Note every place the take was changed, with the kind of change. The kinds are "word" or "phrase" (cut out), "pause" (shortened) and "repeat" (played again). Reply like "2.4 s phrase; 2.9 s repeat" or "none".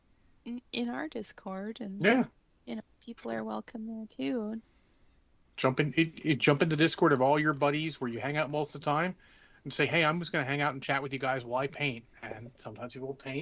none